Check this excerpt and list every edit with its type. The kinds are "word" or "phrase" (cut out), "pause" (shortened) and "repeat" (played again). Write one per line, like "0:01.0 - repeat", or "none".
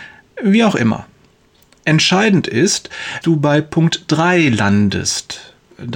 0:03.2 - word